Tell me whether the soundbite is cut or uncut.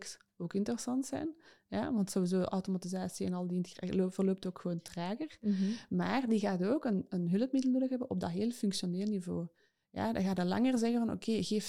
uncut